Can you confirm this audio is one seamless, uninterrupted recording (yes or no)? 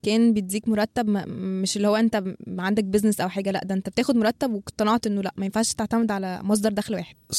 yes